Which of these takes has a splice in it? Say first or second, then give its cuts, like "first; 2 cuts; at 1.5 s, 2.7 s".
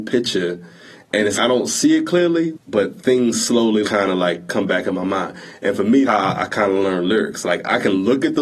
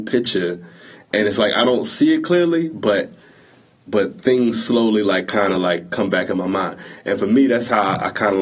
first; 4 cuts; at 1.4 s, 2.5 s, 3.8 s, 6.0 s